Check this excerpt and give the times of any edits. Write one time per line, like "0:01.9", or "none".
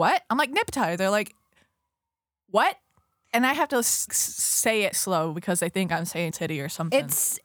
0:04.1
0:04.9
0:06.3